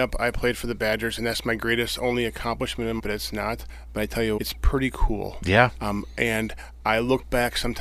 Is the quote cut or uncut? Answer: cut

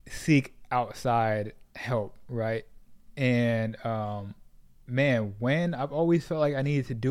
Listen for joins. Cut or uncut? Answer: uncut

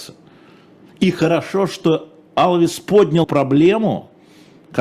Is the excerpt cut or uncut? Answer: cut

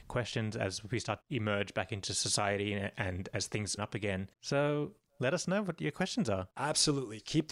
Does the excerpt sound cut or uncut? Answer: cut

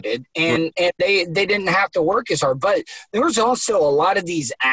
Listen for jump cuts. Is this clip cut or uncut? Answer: uncut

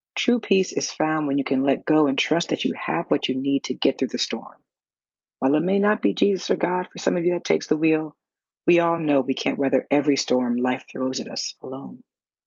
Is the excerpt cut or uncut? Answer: uncut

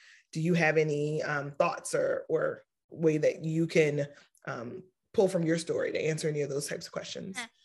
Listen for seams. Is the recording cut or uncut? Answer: uncut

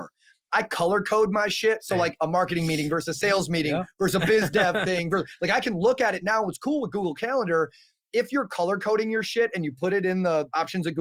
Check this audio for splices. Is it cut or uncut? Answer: uncut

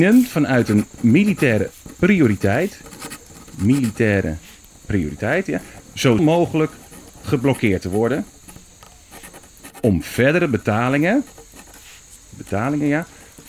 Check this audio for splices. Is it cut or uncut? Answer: cut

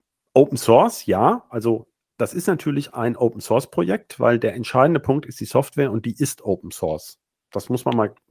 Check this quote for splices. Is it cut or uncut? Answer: uncut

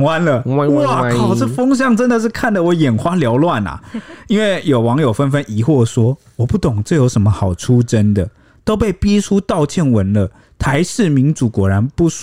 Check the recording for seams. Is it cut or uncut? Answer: uncut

